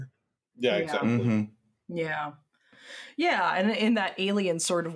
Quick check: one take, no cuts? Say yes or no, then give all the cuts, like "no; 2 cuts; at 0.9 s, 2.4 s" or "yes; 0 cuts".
yes; 0 cuts